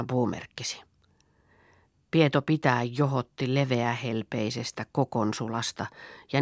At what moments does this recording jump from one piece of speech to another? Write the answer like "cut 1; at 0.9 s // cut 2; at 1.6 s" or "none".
none